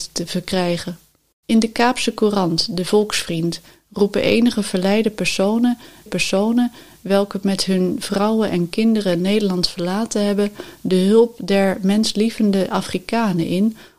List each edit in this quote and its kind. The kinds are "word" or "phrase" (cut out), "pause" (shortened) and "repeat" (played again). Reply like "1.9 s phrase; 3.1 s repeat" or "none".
6.1 s repeat